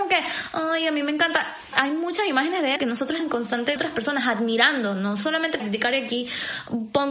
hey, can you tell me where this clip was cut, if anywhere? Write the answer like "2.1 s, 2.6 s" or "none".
1.7 s, 2.8 s, 3.2 s, 3.8 s, 5.6 s

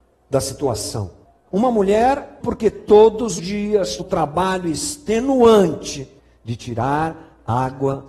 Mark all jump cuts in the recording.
1.2 s, 2.4 s, 3.4 s, 4.0 s, 6.2 s

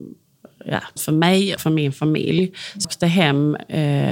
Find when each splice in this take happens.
1.0 s, 1.6 s, 2.8 s

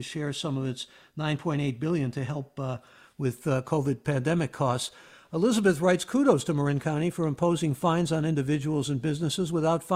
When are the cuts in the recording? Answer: none

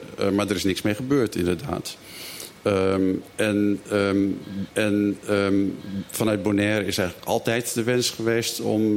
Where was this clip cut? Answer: 4.7 s

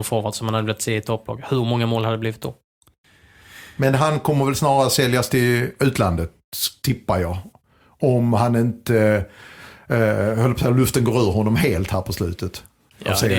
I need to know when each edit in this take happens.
none

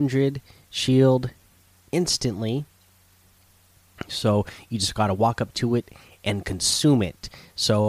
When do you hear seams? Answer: none

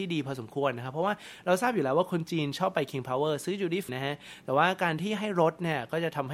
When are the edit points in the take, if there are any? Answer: 3.9 s

